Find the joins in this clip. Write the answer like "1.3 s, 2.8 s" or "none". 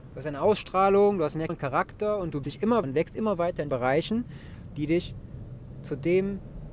1.5 s, 2.4 s, 2.8 s, 3.7 s, 5.8 s